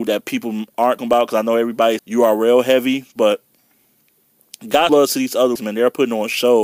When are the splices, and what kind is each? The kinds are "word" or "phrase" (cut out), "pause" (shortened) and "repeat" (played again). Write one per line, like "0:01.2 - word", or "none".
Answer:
0:01.0 - word
0:02.0 - word
0:04.9 - word
0:05.6 - word

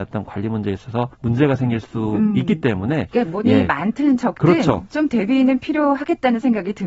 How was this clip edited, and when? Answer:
0:01.1 - pause
0:03.4 - word

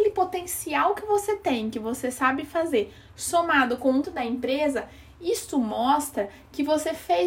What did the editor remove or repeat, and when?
0:04.0 - word

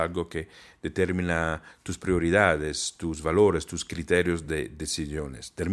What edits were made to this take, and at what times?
none

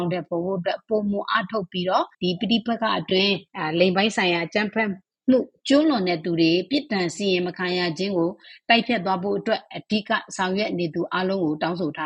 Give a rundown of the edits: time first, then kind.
0:02.1 - pause
0:03.5 - pause
0:05.0 - pause

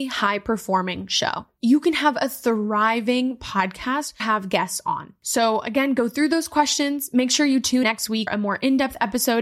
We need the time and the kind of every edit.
0:04.2 - phrase
0:07.8 - word
0:08.3 - word

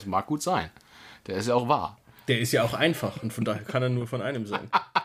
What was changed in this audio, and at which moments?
none

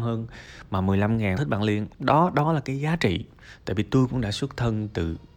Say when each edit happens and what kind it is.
0:01.4 - phrase
0:01.9 - pause

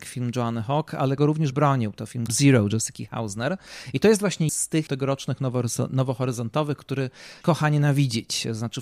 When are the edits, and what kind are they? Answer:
0:01.2 - word
0:01.5 - word
0:02.3 - word
0:04.5 - word
0:04.9 - word
0:07.4 - word

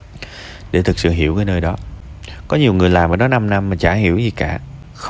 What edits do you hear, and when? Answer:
none

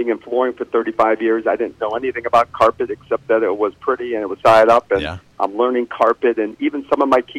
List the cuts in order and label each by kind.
0:04.4 - word

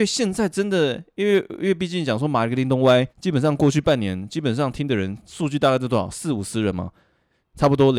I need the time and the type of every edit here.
0:03.1 - pause

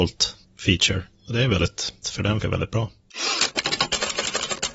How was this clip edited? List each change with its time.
0:02.0 - word
0:02.4 - word

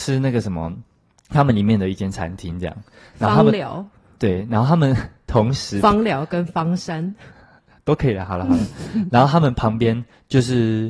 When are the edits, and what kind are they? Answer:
none

